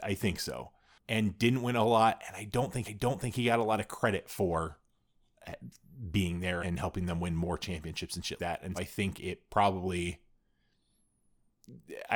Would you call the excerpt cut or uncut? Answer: cut